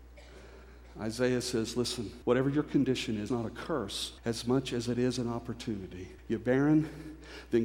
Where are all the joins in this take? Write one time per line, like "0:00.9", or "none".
0:02.2
0:03.3
0:04.2
0:06.2